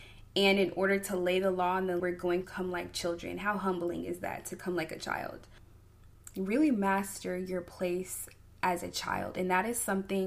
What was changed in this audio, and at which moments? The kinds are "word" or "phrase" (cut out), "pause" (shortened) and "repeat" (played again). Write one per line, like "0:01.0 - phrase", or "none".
0:02.0 - word
0:02.4 - word